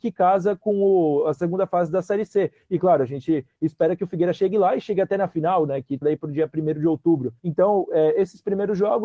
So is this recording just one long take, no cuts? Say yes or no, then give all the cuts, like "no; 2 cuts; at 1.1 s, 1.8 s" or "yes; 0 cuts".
no; 2 cuts; at 6.0 s, 7.4 s